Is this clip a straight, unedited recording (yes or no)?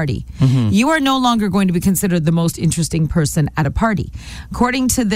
yes